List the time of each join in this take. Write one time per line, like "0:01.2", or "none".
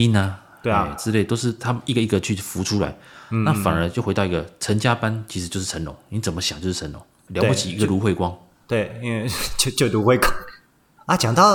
none